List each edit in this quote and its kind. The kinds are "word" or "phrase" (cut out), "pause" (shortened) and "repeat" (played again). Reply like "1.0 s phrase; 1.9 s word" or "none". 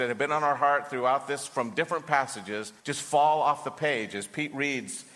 2.8 s pause